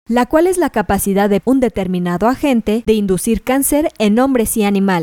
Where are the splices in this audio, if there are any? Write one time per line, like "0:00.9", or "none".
0:01.4
0:02.9